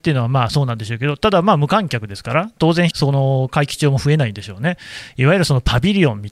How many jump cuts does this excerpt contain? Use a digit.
1